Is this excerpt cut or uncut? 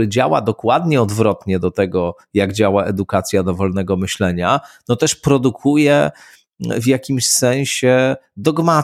uncut